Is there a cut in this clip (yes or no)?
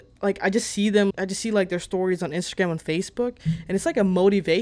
yes